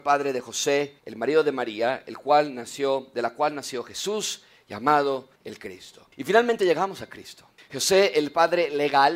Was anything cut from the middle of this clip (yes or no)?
yes